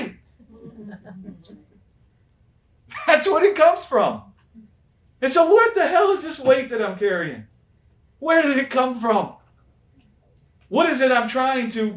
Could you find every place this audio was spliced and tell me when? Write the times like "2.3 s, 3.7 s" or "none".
none